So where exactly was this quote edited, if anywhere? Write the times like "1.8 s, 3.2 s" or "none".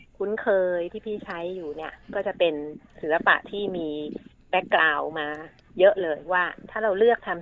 none